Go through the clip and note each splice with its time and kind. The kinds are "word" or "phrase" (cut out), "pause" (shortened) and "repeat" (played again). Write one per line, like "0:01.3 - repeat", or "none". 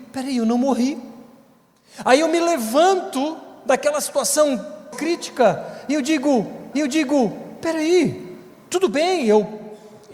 0:04.9 - word
0:06.7 - repeat